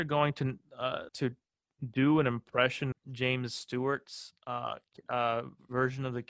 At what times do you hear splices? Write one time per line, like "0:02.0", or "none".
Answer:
0:01.1
0:02.9